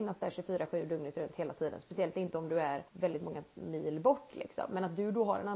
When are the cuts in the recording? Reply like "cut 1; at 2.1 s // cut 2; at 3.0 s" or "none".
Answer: cut 1; at 2.9 s